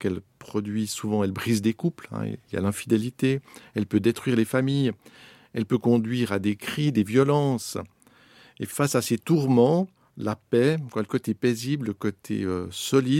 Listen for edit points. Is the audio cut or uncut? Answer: uncut